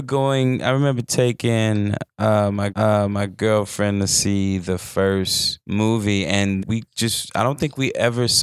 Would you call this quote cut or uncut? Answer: cut